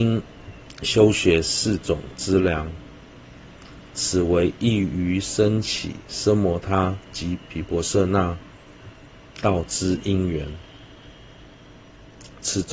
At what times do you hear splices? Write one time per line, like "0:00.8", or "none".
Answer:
0:09.1